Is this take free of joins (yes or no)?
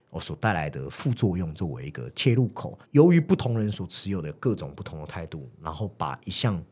no